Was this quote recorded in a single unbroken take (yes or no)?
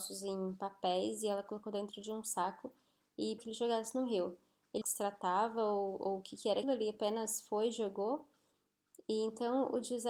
no